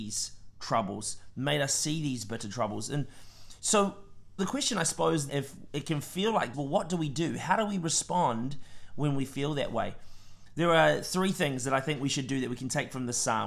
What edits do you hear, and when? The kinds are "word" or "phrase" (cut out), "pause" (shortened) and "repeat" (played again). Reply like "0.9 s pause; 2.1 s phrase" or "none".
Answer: 4.4 s word; 5.3 s word; 6.5 s phrase